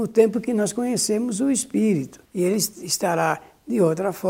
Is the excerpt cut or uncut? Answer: cut